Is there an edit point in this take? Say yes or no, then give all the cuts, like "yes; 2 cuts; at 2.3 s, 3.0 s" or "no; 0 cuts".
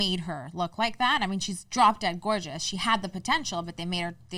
no; 0 cuts